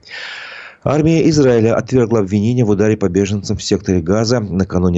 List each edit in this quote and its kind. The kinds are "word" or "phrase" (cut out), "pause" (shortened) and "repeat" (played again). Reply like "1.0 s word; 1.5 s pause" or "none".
none